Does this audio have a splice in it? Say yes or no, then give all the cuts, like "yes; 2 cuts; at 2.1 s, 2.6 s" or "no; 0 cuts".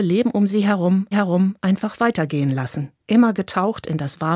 yes; 2 cuts; at 1.1 s, 3.0 s